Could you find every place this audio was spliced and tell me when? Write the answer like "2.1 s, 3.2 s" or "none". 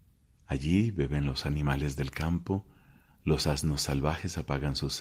none